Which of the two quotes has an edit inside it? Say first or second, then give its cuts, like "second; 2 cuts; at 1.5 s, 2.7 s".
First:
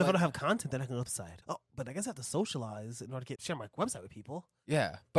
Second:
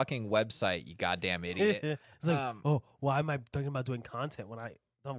first; 3 cuts; at 1.1 s, 1.4 s, 3.4 s